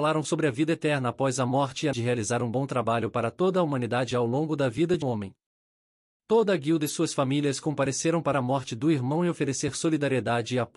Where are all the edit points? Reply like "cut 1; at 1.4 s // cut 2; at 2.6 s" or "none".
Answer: cut 1; at 1.9 s // cut 2; at 5.0 s // cut 3; at 8.3 s